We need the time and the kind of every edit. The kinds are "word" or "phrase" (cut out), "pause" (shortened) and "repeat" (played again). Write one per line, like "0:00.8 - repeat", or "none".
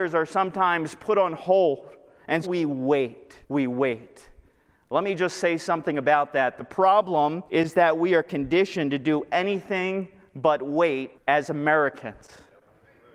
0:02.4 - word
0:03.4 - pause
0:07.5 - pause
0:11.2 - pause